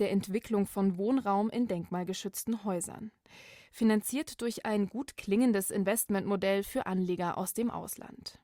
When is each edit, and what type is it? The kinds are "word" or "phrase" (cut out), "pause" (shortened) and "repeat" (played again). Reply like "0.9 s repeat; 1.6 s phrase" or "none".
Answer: none